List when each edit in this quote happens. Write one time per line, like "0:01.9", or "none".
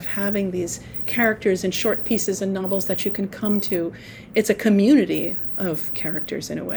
none